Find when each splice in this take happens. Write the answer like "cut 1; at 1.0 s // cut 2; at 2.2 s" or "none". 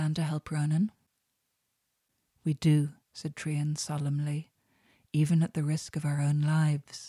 none